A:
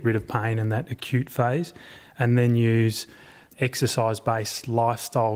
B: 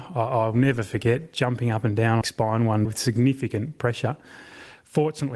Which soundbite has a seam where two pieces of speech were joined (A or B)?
B